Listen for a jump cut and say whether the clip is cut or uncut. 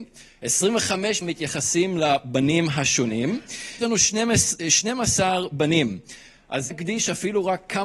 cut